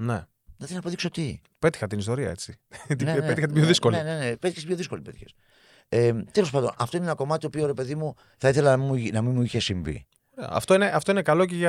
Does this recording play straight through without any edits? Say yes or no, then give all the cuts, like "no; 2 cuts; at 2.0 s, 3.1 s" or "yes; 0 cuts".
yes; 0 cuts